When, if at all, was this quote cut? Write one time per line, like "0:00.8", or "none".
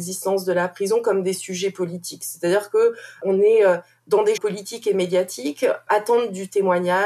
0:04.4
0:05.9